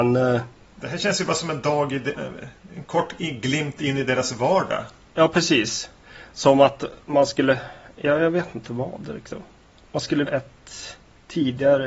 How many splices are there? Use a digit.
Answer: 2